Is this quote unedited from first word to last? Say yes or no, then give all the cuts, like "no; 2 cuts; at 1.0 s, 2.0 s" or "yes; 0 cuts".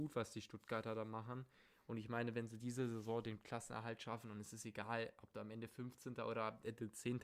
yes; 0 cuts